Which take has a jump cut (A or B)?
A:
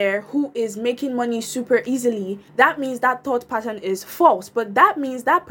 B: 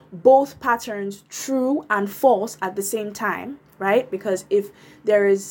A